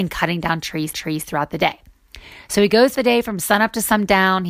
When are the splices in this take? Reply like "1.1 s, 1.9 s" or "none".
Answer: 0.9 s, 2.9 s